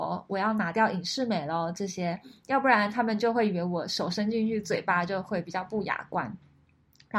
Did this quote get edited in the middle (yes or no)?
no